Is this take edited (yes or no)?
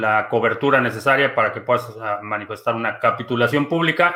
no